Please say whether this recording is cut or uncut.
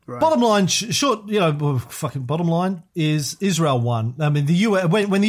uncut